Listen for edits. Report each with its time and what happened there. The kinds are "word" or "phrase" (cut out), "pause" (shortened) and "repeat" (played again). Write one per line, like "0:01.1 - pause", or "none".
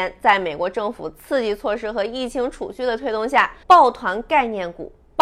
0:03.6 - pause